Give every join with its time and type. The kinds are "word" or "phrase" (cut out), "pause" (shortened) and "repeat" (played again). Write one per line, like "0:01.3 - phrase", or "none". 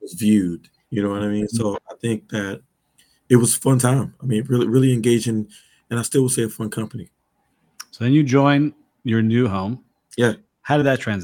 none

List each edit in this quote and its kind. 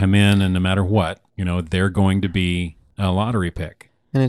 0:01.3 - pause

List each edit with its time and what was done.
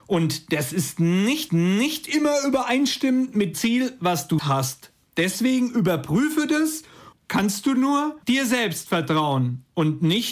0:01.5 - repeat
0:03.5 - word
0:04.4 - word
0:07.1 - phrase
0:08.2 - pause

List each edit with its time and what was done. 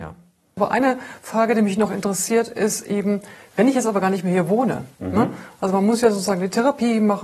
0:04.9 - pause

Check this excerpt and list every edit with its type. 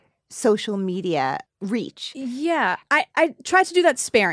none

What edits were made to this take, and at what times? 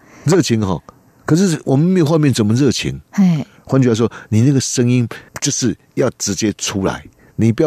0:05.3 - pause

